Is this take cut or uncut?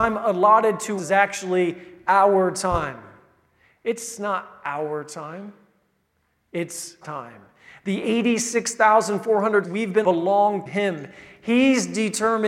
cut